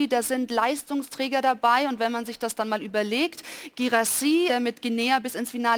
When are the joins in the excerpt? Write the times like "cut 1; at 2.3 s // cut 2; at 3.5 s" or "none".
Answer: cut 1; at 4.5 s